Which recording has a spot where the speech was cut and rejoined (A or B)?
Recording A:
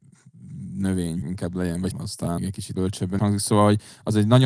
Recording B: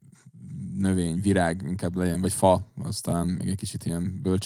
A